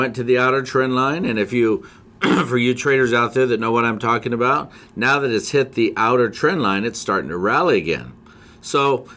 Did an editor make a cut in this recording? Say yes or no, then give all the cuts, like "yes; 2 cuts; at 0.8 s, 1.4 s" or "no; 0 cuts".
no; 0 cuts